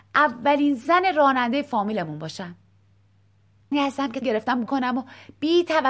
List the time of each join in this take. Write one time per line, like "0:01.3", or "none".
0:03.7
0:04.2
0:04.7

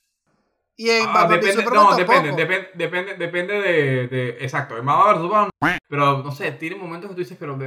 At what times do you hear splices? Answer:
0:05.8

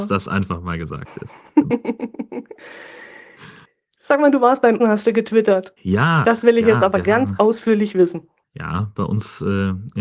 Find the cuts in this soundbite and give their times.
0:02.6
0:04.8
0:05.8
0:08.4

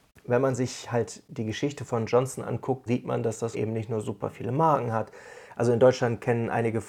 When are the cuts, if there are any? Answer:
0:02.1
0:02.9
0:03.5

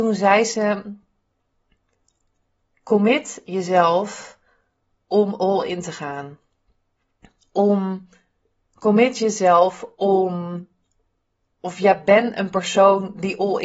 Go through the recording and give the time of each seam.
none

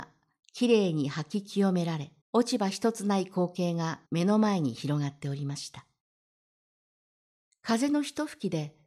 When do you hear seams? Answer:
0:02.2
0:04.1

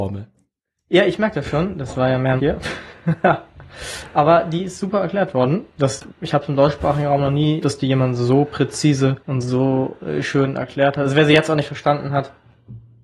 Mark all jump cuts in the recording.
0:02.4
0:07.6
0:09.2

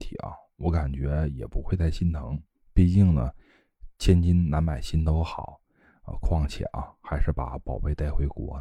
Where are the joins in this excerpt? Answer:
none

